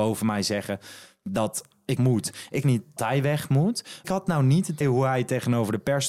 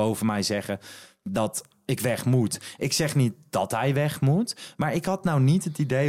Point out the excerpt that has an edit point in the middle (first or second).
first